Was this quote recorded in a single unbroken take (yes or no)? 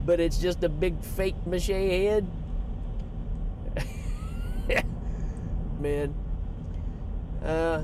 no